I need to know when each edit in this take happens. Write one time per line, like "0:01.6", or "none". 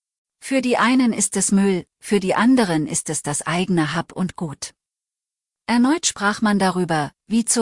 none